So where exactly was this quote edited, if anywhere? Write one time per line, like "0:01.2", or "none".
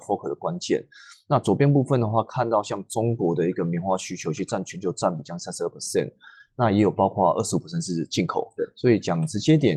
none